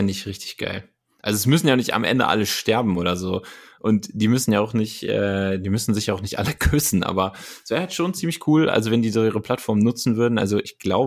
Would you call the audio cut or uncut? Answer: uncut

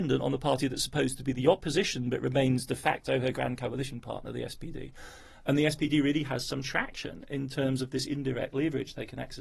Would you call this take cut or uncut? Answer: uncut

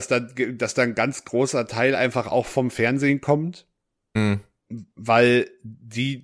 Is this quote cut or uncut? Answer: uncut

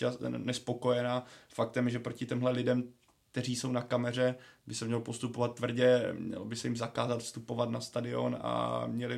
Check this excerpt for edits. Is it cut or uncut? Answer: uncut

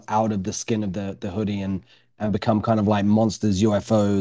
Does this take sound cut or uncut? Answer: uncut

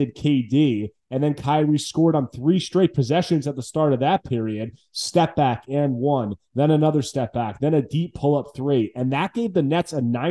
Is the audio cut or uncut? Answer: uncut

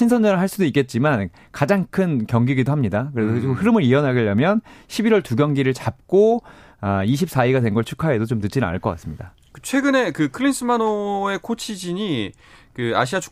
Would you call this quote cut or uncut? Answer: uncut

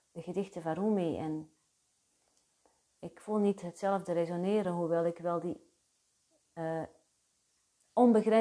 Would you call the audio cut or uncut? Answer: uncut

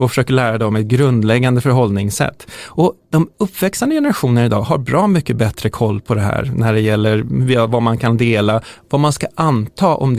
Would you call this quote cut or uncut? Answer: uncut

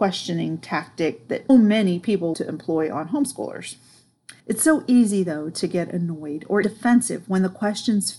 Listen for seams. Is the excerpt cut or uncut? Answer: cut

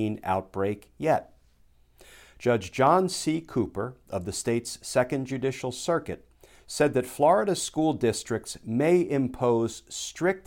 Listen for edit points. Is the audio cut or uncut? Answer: uncut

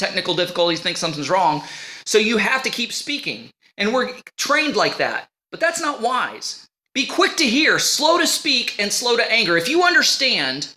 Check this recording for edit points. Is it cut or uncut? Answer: uncut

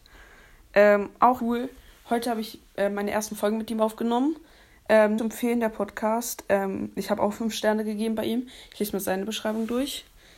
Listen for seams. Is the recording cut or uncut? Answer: cut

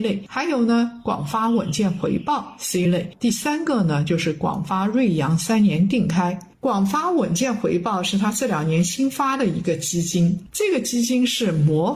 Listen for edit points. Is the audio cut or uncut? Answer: cut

